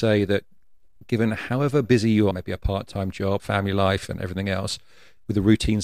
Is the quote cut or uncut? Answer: cut